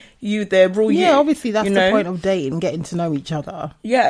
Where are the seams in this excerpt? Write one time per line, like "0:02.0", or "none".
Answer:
none